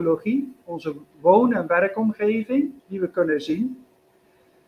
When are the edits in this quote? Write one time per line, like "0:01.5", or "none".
0:02.8